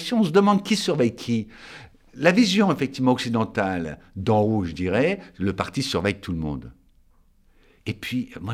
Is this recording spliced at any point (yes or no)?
no